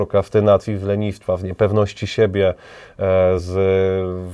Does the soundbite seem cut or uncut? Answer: uncut